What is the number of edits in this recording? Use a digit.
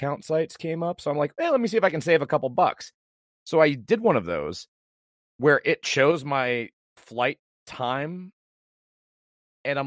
0